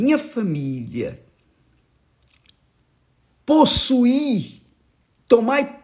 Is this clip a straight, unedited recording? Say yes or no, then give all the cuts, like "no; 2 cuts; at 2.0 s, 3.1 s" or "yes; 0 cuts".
yes; 0 cuts